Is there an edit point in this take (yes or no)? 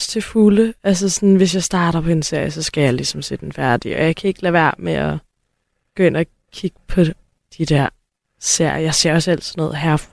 no